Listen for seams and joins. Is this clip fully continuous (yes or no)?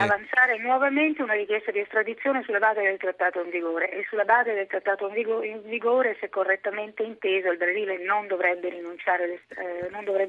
yes